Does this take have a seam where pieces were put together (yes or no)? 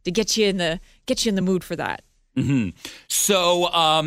no